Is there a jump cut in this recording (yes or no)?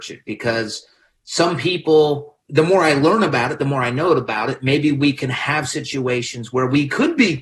no